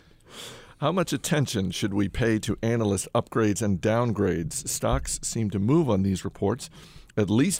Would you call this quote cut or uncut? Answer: uncut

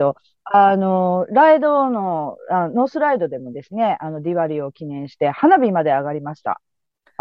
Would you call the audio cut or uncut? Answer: uncut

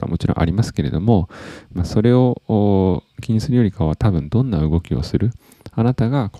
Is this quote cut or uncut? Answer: uncut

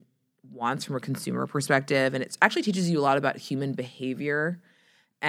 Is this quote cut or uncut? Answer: uncut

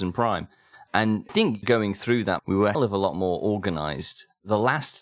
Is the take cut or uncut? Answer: cut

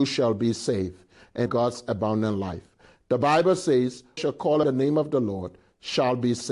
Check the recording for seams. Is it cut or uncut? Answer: cut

